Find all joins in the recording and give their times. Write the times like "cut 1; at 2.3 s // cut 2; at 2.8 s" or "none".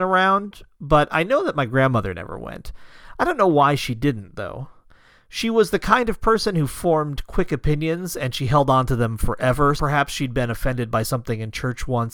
cut 1; at 9.8 s